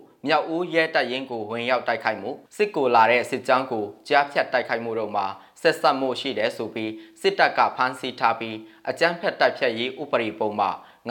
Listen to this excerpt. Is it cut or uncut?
cut